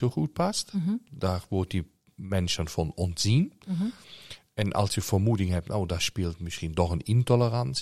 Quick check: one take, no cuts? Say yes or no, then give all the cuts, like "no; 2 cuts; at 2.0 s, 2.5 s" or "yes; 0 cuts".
yes; 0 cuts